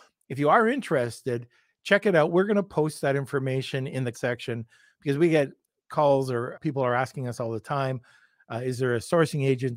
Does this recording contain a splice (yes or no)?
yes